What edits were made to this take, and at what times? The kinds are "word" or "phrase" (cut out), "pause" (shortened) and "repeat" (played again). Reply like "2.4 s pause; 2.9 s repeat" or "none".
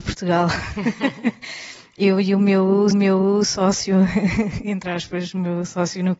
2.9 s repeat